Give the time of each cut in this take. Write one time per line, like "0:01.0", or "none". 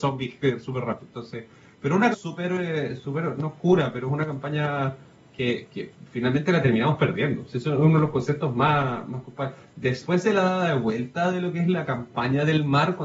0:02.1